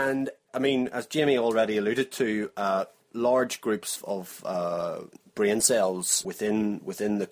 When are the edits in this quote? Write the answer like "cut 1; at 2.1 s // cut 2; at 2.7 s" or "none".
none